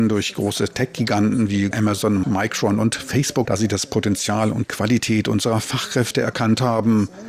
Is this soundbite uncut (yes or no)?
no